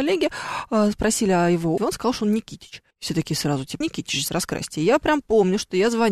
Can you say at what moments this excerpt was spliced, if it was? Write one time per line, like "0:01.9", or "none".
0:01.8
0:02.9
0:03.8
0:04.3

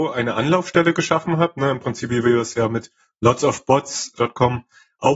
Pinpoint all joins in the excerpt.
0:02.1

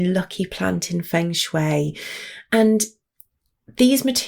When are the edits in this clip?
none

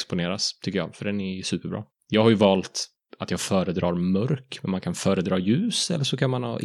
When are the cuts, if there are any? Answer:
none

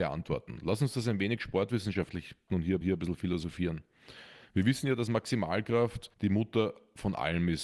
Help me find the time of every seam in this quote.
0:02.5
0:02.8
0:06.1

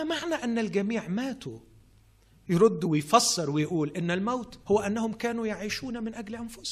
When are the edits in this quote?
0:04.6

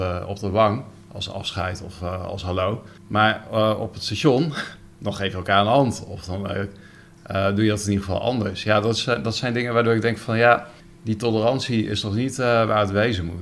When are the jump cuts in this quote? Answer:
0:03.0
0:04.9
0:10.8

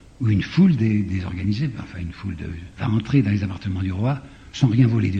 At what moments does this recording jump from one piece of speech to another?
0:02.7

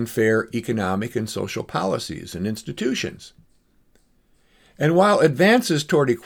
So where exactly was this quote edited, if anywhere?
none

